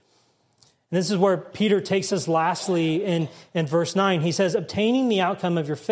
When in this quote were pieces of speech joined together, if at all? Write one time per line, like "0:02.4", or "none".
none